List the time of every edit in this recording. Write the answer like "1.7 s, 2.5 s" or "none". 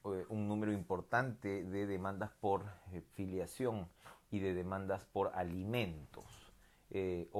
none